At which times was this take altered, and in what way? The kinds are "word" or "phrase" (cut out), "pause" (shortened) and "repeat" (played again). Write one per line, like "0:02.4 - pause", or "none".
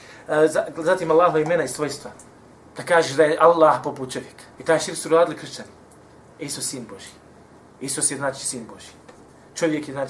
0:02.3 - pause
0:04.5 - pause